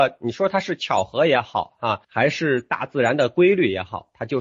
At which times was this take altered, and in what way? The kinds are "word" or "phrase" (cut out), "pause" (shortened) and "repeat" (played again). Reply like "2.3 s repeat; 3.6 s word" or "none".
2.0 s pause